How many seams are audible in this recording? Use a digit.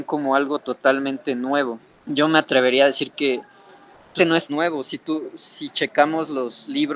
3